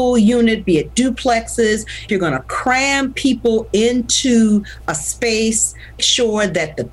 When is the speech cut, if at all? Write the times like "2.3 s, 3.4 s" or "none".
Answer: 2.1 s, 6.0 s